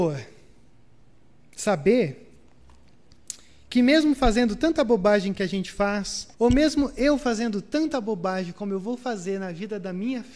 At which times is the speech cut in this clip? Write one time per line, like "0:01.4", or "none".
0:06.3